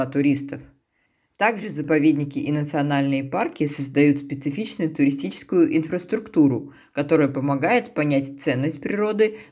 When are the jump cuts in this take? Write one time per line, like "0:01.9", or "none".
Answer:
none